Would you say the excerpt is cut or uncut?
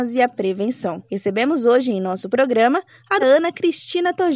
cut